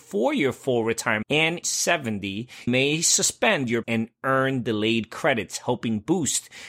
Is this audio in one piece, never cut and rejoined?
no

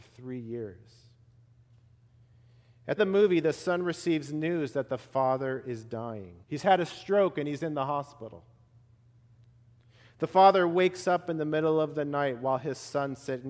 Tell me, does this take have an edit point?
yes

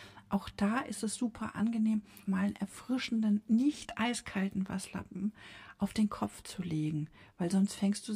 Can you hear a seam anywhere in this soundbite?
yes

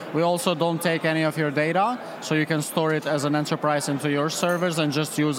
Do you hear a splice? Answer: no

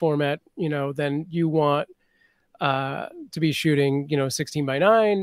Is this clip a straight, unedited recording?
yes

